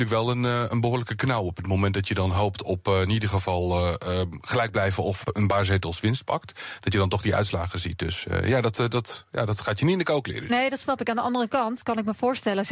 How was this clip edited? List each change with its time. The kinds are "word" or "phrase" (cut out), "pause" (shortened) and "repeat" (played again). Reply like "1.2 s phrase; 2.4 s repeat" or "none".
5.2 s word